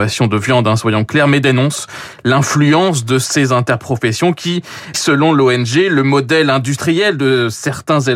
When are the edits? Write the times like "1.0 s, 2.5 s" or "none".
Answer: 4.9 s

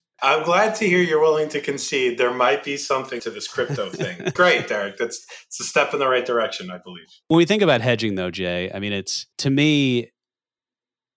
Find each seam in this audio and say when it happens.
3.2 s, 4.4 s, 7.2 s, 9.3 s

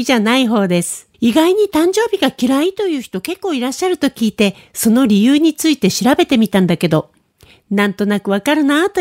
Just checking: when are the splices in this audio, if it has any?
1.1 s

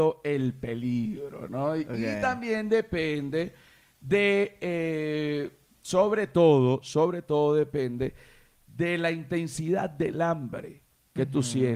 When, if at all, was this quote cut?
none

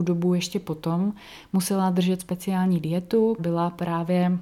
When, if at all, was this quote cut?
2.2 s, 3.4 s

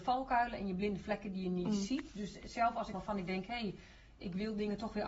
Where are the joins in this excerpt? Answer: 2.9 s

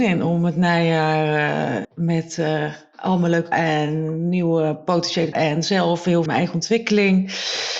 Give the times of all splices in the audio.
1.8 s, 3.5 s, 5.3 s, 6.3 s

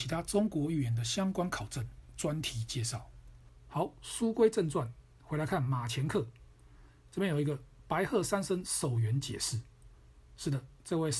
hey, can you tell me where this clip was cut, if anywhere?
none

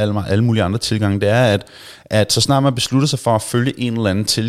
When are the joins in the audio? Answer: none

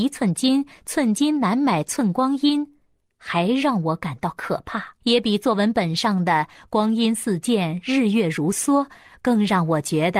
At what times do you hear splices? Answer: 5.0 s

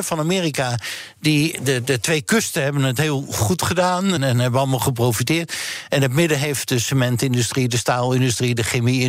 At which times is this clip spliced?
4.2 s

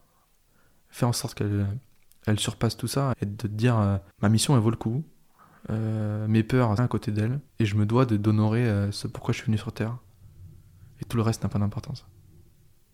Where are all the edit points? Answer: 3.1 s, 4.1 s, 6.8 s, 7.5 s

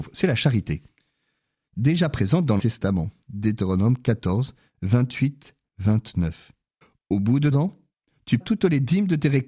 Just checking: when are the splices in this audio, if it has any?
2.6 s, 6.8 s, 7.5 s, 8.4 s

